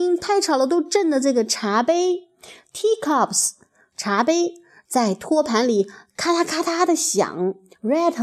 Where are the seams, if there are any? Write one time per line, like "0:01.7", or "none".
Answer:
none